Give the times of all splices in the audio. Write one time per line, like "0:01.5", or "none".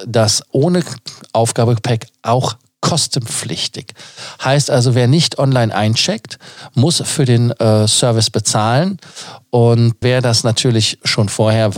0:10.0